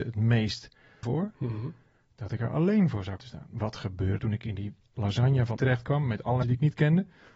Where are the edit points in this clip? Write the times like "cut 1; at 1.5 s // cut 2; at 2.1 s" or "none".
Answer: cut 1; at 1.0 s // cut 2; at 3.2 s // cut 3; at 4.2 s // cut 4; at 5.6 s // cut 5; at 6.4 s